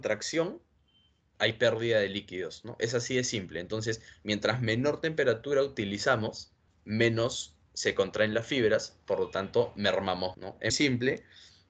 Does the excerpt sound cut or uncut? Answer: cut